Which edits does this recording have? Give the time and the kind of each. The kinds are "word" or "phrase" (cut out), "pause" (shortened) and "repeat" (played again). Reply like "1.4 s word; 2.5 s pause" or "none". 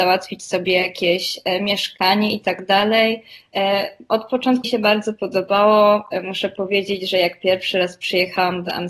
4.6 s word